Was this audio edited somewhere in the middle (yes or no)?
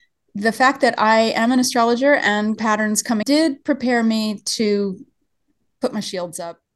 yes